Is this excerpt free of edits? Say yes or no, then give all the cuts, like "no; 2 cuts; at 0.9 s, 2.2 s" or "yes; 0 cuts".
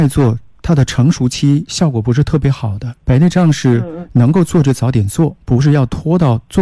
no; 1 cut; at 3.0 s